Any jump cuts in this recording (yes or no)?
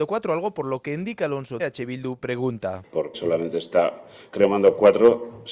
yes